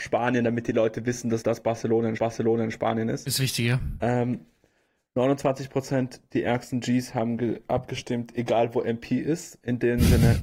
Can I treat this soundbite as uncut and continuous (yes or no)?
no